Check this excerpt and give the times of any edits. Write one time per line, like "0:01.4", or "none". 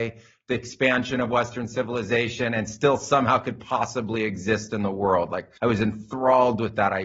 0:05.6